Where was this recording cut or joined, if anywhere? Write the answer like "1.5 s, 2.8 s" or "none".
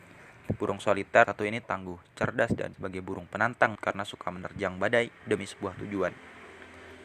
1.2 s, 1.6 s, 2.7 s, 3.7 s